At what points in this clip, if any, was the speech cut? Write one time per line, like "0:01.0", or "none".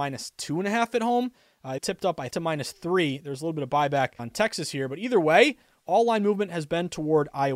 0:01.8
0:02.3
0:04.2